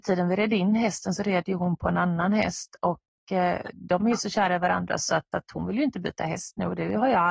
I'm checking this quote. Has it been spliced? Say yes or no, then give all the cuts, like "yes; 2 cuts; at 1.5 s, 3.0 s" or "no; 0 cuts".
yes; 1 cut; at 5.3 s